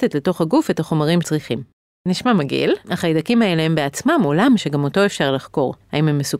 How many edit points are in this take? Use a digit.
3